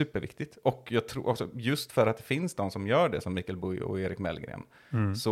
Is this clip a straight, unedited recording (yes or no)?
yes